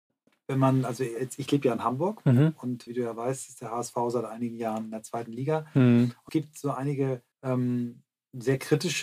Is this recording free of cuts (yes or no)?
no